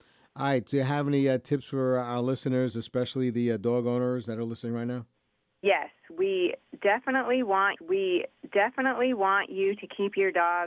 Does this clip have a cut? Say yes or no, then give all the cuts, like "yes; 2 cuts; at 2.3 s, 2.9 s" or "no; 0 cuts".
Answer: yes; 2 cuts; at 5.3 s, 7.8 s